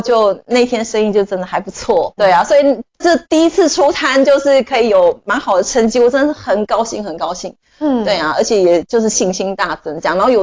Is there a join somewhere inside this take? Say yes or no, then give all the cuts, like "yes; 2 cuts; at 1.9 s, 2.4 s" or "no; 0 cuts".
yes; 2 cuts; at 2.2 s, 3.2 s